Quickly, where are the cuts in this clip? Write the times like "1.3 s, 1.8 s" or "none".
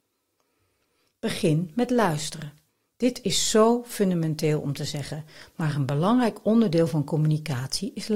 none